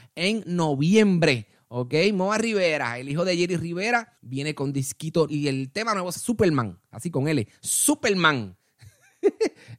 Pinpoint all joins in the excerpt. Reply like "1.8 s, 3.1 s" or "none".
4.2 s, 5.3 s, 6.2 s